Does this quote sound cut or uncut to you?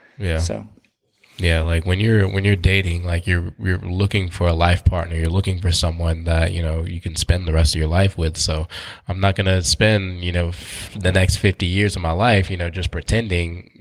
uncut